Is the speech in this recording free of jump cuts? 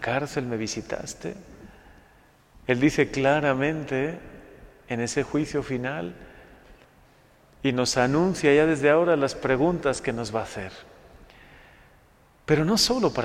yes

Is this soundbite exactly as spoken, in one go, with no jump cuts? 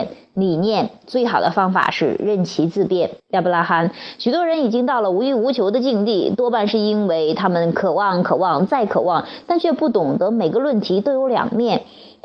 no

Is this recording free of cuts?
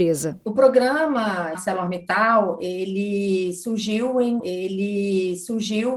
no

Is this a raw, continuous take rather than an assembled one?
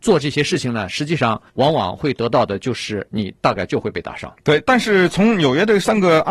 no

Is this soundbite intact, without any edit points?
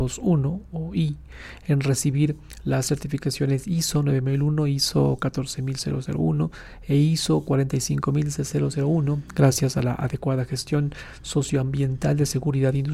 yes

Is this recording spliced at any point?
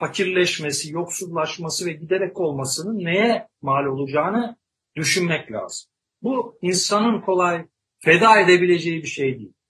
yes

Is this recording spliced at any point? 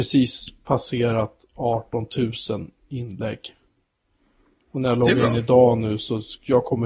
no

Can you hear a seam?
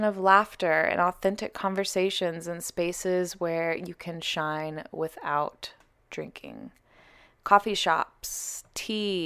no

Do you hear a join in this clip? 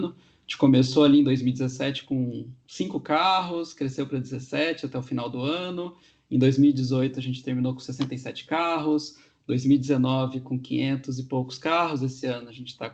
no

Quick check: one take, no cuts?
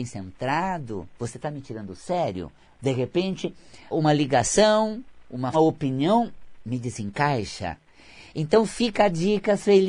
no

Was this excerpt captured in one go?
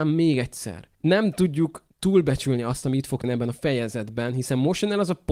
no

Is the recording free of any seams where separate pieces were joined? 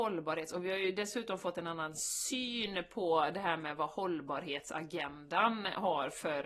yes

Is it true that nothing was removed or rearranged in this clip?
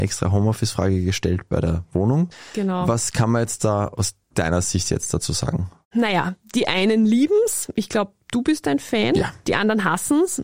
yes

